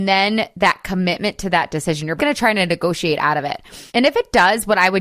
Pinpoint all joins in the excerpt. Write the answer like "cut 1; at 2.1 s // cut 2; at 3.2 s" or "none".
cut 1; at 2.2 s // cut 2; at 3.9 s